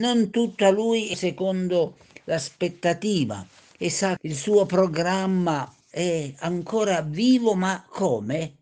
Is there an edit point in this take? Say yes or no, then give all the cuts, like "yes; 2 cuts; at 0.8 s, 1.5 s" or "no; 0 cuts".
yes; 3 cuts; at 1.1 s, 4.2 s, 5.8 s